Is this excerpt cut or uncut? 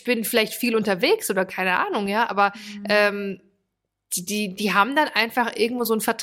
uncut